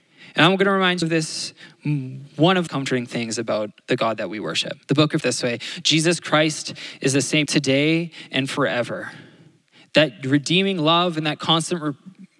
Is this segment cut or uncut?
cut